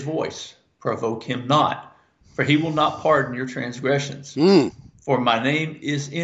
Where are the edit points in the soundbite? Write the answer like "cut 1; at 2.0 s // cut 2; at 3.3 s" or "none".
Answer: none